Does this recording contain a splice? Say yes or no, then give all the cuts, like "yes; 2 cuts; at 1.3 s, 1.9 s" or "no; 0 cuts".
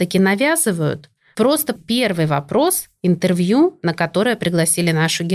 yes; 1 cut; at 1.8 s